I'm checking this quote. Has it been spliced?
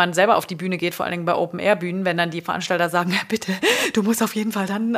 no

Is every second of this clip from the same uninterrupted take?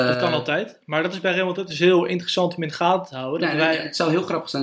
yes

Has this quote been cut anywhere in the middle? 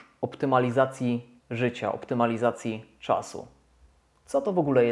yes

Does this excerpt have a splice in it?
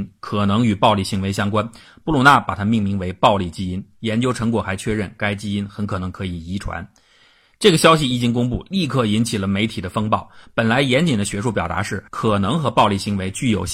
yes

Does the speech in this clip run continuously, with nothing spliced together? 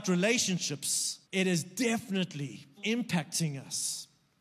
no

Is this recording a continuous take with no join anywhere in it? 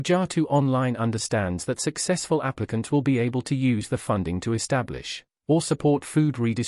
yes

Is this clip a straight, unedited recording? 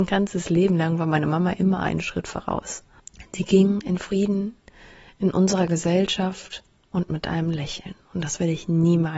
yes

